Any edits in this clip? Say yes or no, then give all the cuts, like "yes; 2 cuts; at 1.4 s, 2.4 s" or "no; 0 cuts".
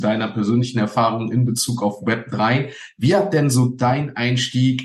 no; 0 cuts